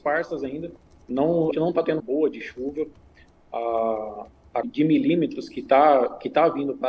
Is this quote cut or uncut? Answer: cut